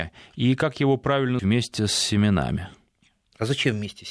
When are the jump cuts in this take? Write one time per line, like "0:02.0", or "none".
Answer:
0:01.4